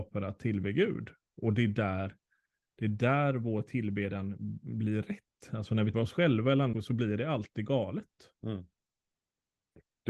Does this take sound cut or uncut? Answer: cut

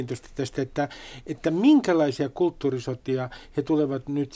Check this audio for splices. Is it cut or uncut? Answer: uncut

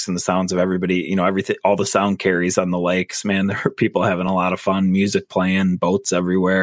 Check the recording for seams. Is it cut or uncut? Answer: uncut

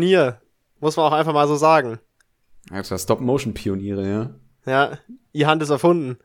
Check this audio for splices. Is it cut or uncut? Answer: uncut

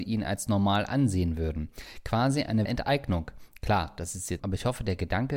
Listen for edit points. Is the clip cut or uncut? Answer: cut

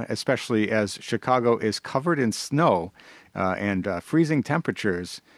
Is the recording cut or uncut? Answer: uncut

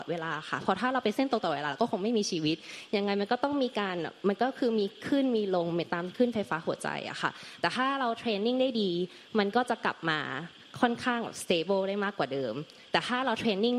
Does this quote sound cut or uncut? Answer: uncut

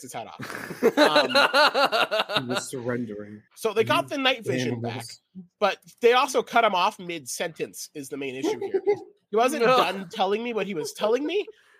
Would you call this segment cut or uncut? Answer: cut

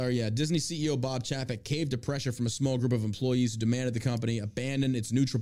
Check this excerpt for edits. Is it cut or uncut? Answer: uncut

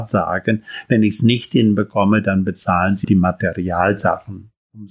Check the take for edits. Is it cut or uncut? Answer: cut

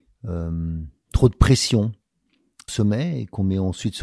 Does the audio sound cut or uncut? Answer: cut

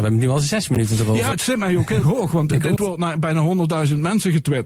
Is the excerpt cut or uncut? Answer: cut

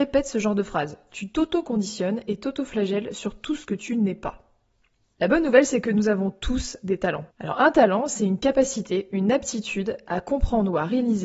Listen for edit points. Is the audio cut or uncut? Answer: cut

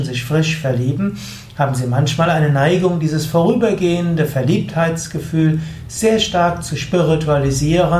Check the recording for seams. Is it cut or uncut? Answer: uncut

